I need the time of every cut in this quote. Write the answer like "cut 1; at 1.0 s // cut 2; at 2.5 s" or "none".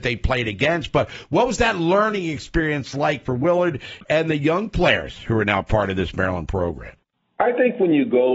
cut 1; at 7.0 s

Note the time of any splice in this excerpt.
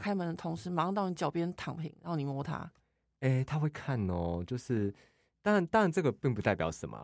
none

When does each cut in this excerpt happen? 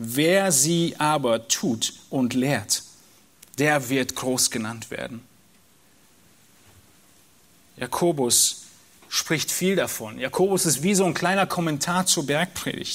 none

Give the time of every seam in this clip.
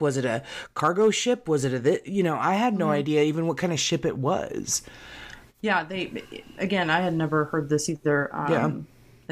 none

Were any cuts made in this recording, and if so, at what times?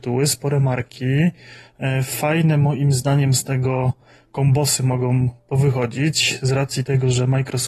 none

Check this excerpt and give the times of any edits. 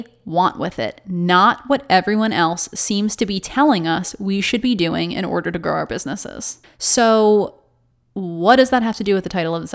cut 1; at 6.6 s

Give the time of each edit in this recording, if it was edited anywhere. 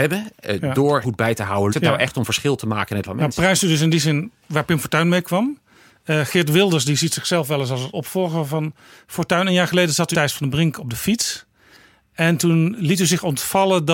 cut 1; at 1.0 s // cut 2; at 1.7 s // cut 3; at 3.0 s // cut 4; at 4.4 s // cut 5; at 7.9 s // cut 6; at 10.1 s // cut 7; at 12.8 s

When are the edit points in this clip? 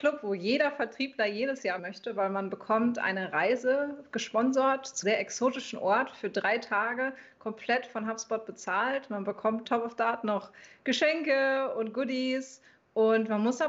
cut 1; at 1.8 s // cut 2; at 5.0 s // cut 3; at 9.6 s

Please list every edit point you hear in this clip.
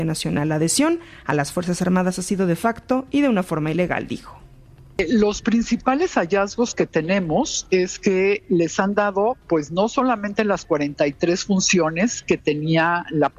none

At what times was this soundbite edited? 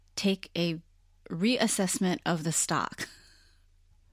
none

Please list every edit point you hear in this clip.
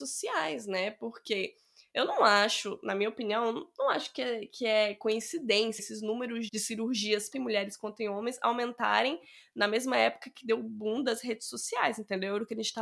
cut 1; at 5.8 s // cut 2; at 6.5 s // cut 3; at 7.3 s

